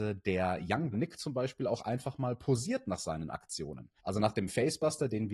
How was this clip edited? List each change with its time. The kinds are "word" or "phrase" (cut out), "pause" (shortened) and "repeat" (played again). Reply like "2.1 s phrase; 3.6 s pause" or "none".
0.9 s phrase; 4.0 s pause